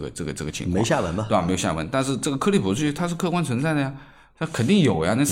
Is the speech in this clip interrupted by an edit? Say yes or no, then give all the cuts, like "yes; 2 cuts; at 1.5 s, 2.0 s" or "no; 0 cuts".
no; 0 cuts